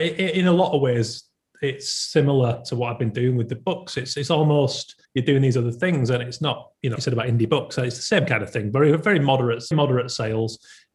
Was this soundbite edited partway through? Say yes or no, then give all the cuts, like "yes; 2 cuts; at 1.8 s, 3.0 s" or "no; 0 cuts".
yes; 3 cuts; at 5.0 s, 7.0 s, 9.7 s